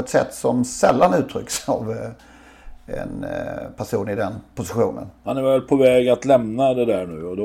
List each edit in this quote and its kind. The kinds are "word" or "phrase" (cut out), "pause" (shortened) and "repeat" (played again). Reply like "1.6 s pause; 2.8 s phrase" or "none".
none